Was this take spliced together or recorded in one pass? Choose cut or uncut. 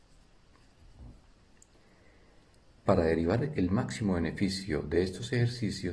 uncut